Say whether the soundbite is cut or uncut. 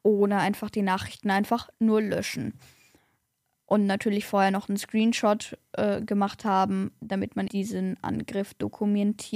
cut